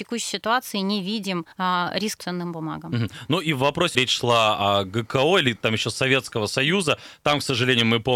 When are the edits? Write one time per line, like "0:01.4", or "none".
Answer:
0:01.5
0:02.2
0:03.9
0:05.6